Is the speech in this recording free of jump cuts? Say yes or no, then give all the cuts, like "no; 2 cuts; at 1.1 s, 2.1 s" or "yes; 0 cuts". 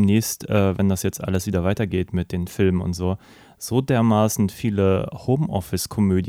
yes; 0 cuts